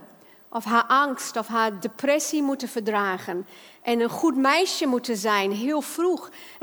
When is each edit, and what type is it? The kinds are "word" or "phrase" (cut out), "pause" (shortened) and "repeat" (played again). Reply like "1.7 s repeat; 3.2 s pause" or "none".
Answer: none